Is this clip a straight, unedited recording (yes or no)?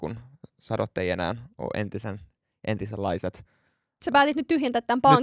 yes